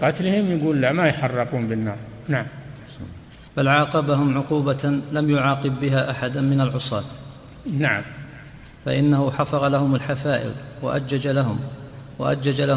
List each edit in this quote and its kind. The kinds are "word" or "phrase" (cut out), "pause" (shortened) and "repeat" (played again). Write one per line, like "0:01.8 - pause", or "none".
0:03.5 - pause
0:08.7 - pause